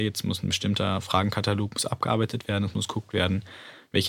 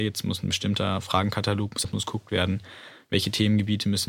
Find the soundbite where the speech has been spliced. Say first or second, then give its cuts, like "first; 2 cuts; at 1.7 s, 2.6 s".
second; 1 cut; at 1.8 s